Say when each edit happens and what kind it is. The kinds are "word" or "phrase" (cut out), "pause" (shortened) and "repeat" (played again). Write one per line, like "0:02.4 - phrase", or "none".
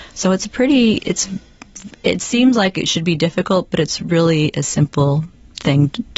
0:02.0 - pause

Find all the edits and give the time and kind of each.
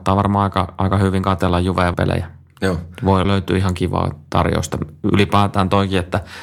0:01.9 - word
0:03.2 - word

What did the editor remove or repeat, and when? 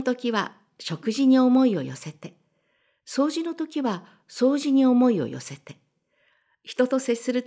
none

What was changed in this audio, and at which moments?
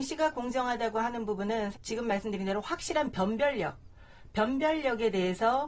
0:01.7 - word

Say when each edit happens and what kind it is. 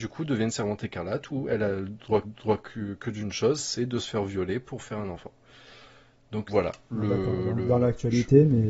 0:02.2 - repeat
0:06.5 - word

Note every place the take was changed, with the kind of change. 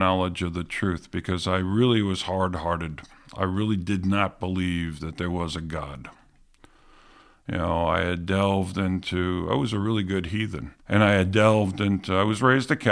0:10.8 - pause

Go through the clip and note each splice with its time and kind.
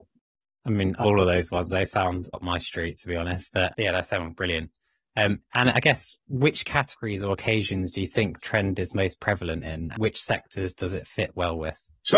0:01.0 - word
0:02.3 - word
0:03.7 - word
0:08.4 - word
0:09.9 - word

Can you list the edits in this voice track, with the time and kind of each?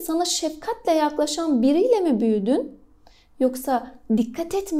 none

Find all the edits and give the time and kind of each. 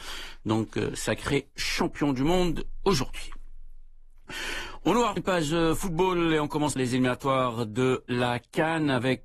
0:05.2 - word
0:06.8 - word

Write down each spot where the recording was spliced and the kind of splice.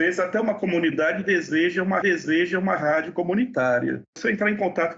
0:02.0 - repeat

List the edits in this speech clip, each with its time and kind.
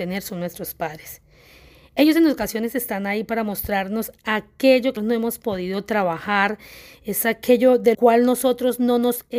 0:05.0 - word
0:07.9 - word

